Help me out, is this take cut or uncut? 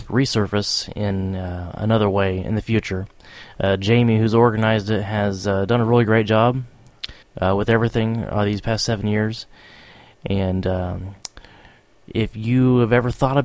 cut